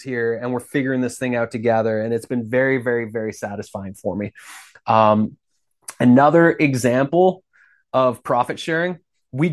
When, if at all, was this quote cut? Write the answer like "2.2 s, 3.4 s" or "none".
none